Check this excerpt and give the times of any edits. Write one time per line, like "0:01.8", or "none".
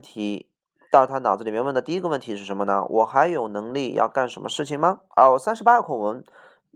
0:05.1